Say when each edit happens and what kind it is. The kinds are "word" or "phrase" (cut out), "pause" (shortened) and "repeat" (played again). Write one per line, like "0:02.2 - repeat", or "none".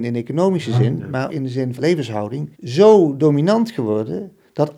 0:01.3 - word
0:01.8 - word
0:02.5 - pause